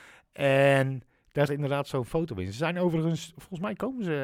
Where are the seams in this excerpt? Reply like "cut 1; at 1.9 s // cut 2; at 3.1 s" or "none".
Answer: cut 1; at 1.5 s